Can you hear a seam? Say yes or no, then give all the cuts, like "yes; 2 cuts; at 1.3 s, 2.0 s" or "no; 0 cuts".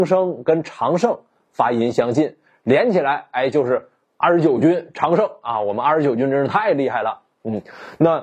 no; 0 cuts